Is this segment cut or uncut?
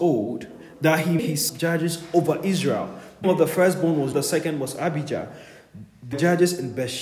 cut